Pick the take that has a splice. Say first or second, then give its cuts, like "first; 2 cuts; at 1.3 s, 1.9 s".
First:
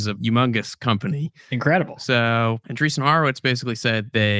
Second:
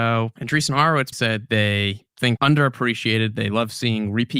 second; 2 cuts; at 1.1 s, 2.4 s